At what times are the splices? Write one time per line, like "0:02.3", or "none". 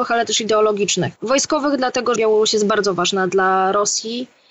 0:01.2
0:02.2